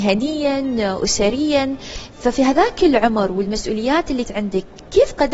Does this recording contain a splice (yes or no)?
yes